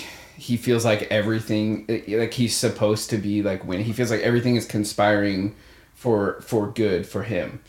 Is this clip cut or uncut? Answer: uncut